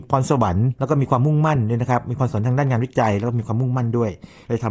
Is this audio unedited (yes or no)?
yes